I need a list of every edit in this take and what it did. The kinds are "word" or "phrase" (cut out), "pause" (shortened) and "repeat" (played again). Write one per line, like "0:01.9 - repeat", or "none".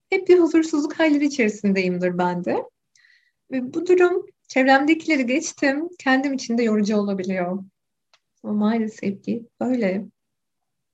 none